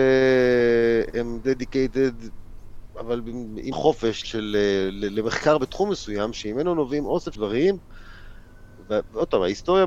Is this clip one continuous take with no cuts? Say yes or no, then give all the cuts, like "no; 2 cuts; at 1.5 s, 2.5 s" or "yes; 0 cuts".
no; 3 cuts; at 3.7 s, 4.2 s, 7.3 s